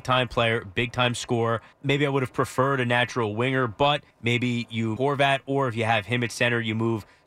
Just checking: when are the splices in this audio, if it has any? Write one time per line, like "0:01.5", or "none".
0:01.7
0:04.1
0:05.0